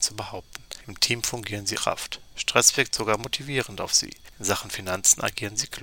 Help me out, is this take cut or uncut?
cut